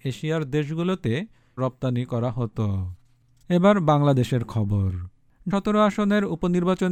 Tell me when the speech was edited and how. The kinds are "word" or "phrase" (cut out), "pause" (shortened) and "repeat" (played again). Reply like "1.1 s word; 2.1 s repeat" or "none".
1.6 s word; 5.5 s word